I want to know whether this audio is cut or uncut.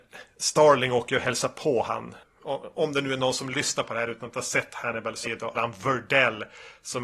cut